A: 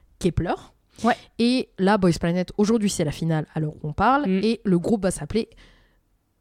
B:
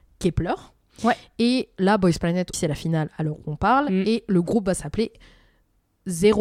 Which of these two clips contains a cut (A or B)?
B